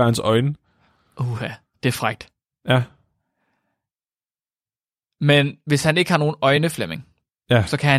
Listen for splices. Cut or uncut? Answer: uncut